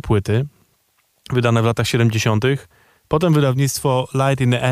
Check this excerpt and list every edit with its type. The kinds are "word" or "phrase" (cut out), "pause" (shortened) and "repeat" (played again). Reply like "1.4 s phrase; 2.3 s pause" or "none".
none